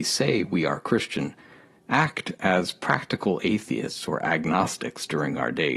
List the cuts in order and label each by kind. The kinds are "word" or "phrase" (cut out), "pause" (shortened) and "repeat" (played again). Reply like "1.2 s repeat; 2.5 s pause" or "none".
none